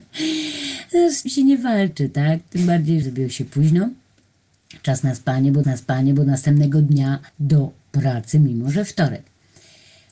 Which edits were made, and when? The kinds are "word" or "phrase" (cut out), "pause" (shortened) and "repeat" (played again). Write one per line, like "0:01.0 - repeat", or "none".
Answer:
0:01.3 - phrase
0:03.0 - phrase
0:05.6 - repeat
0:07.3 - pause